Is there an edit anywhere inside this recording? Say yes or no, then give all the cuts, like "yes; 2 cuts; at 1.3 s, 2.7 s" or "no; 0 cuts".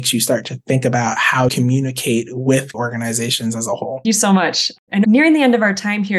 yes; 4 cuts; at 1.5 s, 2.7 s, 4.0 s, 5.0 s